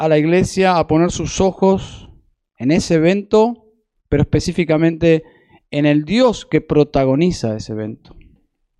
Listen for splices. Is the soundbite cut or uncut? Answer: uncut